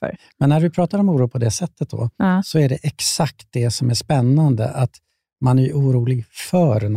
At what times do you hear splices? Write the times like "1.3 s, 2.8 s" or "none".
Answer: none